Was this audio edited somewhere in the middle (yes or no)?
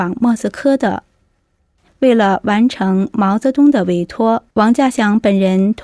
yes